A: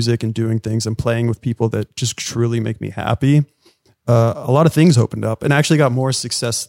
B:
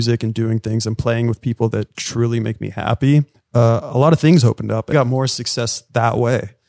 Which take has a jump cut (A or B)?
B